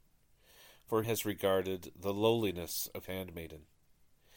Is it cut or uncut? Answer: cut